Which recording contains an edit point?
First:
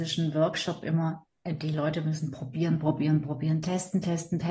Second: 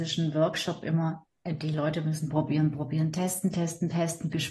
second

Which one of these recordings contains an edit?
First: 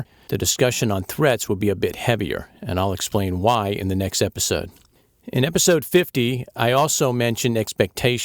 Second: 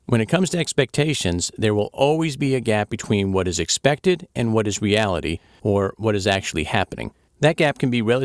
second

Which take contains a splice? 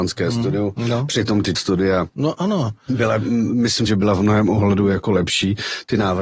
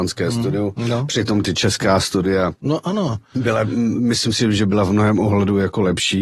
first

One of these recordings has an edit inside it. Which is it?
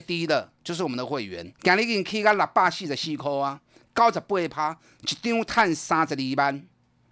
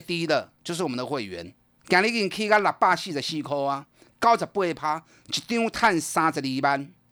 first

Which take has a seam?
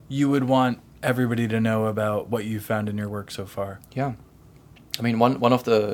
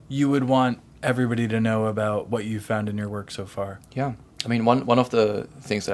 second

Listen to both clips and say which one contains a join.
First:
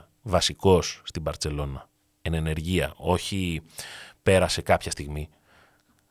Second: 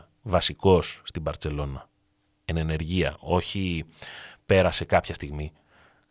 first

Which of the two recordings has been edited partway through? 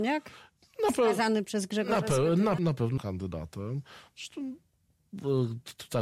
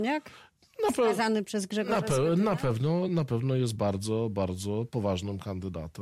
first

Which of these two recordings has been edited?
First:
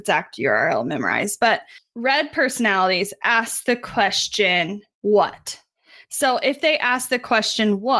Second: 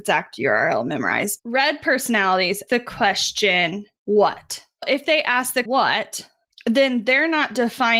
second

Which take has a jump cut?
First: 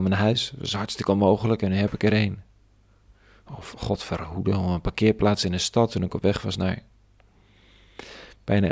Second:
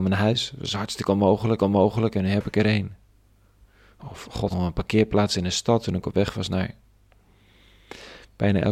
second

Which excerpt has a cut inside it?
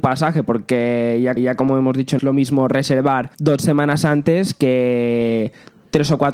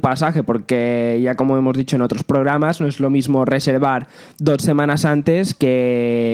first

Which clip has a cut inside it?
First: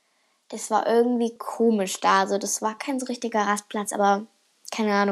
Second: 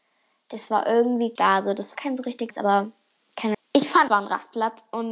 second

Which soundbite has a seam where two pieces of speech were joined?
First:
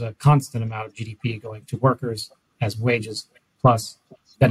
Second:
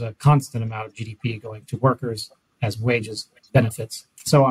second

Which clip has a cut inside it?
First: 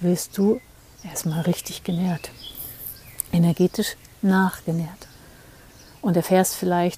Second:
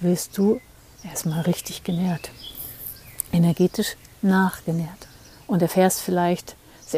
second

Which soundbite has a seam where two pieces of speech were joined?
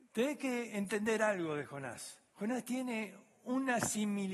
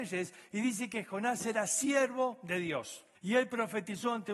second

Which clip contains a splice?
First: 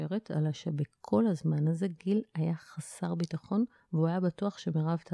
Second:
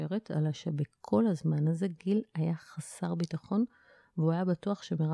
first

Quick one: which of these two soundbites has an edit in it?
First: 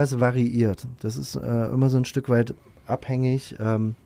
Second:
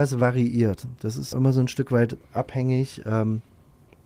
second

